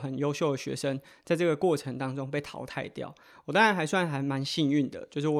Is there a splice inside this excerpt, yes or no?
no